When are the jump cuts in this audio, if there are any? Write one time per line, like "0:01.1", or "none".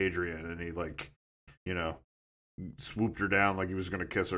none